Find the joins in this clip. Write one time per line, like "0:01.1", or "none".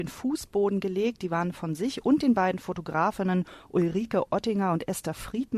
none